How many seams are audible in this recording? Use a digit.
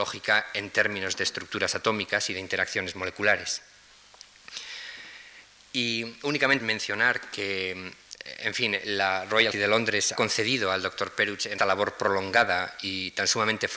5